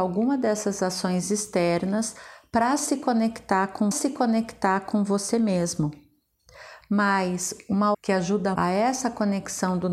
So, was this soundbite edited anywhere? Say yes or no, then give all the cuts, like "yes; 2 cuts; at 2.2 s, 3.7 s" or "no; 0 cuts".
yes; 3 cuts; at 3.9 s, 7.9 s, 8.5 s